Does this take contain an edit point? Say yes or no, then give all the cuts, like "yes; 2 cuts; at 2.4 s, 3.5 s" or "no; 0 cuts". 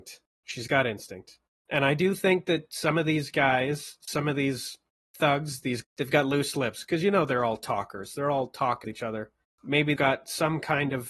yes; 3 cuts; at 5.8 s, 8.8 s, 10.0 s